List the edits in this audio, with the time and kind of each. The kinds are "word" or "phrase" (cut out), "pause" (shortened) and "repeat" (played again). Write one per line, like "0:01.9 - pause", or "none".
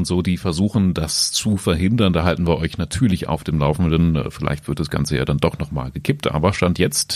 none